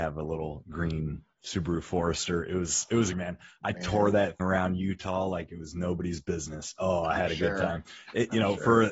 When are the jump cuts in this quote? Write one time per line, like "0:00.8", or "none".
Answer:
0:01.3
0:03.1
0:04.4